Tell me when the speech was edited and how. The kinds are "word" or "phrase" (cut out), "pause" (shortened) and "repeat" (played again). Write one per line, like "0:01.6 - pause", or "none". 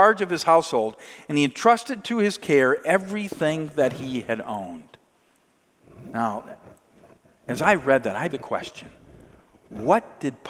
0:08.3 - word